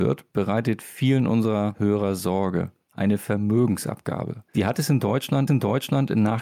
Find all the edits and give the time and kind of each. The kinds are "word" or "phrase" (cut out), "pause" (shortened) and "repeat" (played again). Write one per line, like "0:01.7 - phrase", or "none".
0:04.5 - pause
0:05.5 - repeat